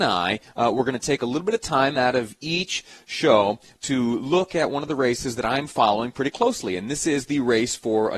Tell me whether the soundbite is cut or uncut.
uncut